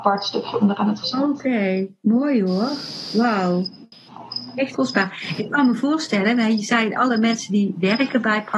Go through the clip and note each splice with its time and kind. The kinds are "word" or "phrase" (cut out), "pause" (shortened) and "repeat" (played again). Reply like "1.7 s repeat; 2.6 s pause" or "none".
1.0 s word; 4.7 s word